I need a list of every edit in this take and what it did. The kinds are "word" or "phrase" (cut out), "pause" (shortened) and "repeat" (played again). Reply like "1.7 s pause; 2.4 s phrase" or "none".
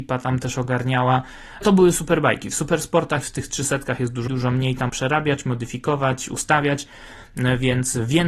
1.6 s word; 3.2 s word; 4.3 s word; 4.9 s word